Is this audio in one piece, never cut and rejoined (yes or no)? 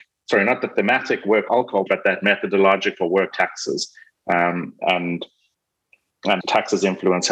no